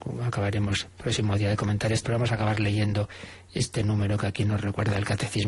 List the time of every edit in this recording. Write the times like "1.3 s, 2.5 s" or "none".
2.0 s